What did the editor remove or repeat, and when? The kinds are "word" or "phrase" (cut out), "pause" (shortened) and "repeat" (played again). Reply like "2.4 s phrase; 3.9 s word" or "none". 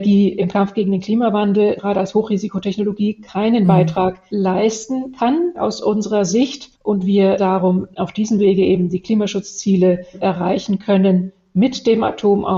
6.7 s pause